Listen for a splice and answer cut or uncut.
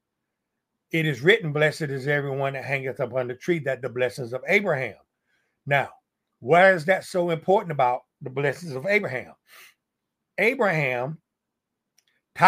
uncut